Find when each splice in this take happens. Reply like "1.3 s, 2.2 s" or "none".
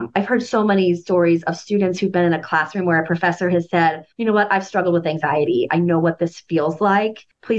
4.1 s